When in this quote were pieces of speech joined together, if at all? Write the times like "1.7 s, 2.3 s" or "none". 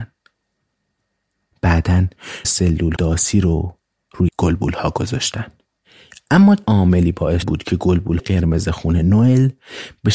2.4 s, 3.0 s, 4.3 s, 6.6 s, 7.4 s, 8.2 s